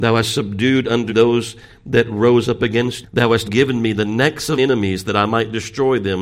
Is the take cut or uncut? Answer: cut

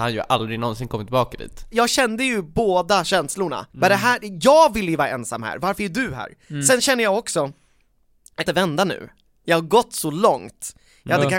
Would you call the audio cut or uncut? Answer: cut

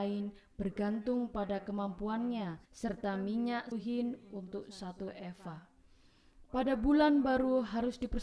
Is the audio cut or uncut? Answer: cut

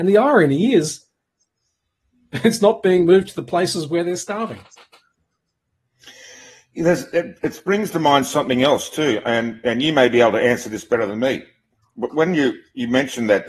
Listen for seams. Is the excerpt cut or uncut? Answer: uncut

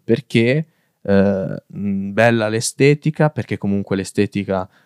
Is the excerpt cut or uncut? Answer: uncut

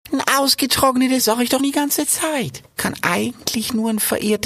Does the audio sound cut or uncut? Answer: cut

